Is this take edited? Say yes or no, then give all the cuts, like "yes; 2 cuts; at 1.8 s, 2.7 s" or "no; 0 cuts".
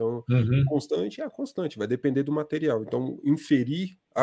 no; 0 cuts